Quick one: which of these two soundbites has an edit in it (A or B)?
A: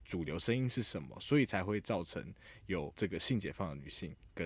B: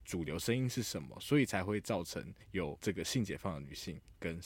B